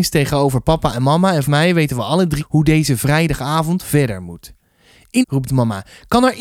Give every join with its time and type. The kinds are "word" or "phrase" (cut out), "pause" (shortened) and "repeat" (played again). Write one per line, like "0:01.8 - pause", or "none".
0:01.5 - word
0:02.4 - word
0:05.2 - word